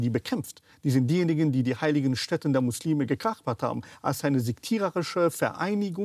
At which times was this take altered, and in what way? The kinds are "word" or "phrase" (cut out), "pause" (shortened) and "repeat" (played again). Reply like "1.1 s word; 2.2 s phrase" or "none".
none